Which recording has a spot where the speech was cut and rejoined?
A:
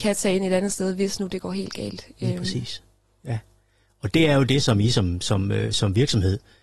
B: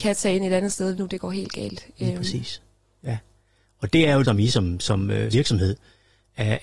B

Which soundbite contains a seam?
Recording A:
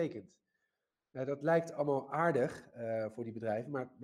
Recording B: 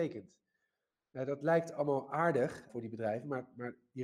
B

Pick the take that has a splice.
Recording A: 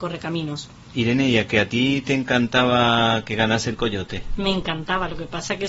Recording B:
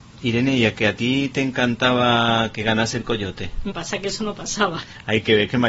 B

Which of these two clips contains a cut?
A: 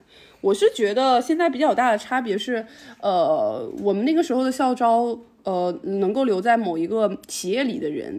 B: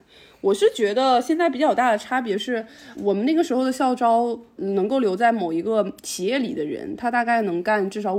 B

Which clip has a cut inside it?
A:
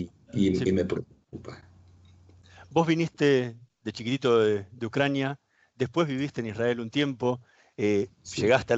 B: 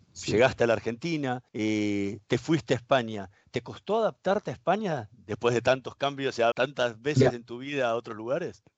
B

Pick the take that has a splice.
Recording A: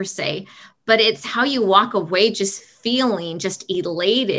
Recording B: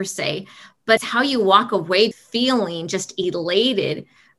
B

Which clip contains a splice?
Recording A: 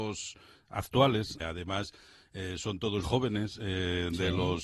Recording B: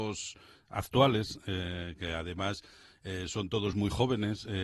A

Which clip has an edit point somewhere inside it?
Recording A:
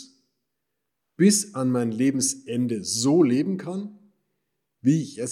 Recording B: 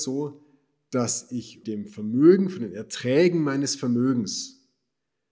B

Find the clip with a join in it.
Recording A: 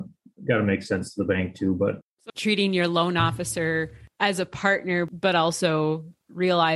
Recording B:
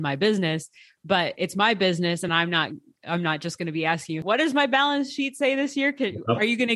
A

